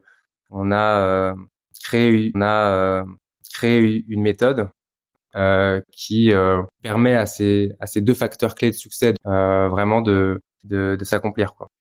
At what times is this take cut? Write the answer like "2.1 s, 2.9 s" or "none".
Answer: 2.3 s, 6.7 s, 9.2 s, 10.5 s